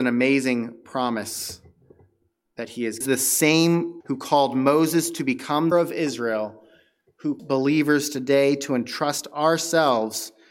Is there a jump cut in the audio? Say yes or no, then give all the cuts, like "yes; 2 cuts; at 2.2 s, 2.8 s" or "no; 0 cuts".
yes; 4 cuts; at 3.0 s, 4.0 s, 5.7 s, 7.4 s